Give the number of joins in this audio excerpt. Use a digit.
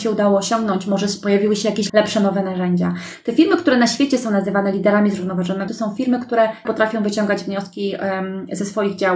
3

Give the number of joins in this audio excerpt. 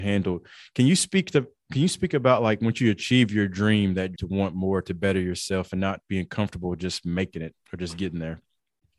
1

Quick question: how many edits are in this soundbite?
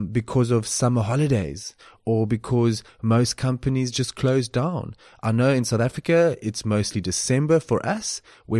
0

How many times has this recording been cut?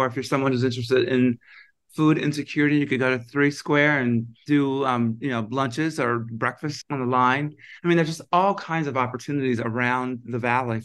0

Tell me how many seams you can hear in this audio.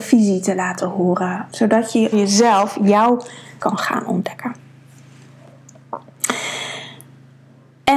3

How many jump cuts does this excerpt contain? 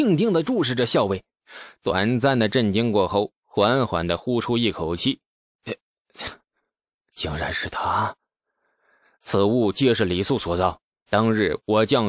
0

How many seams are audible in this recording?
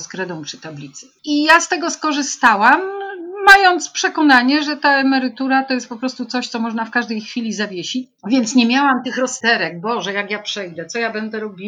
1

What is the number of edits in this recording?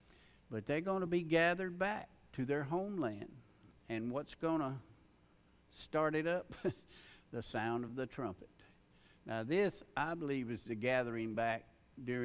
0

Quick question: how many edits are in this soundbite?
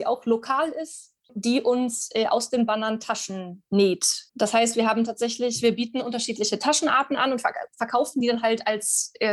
0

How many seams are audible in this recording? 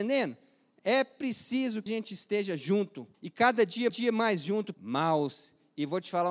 4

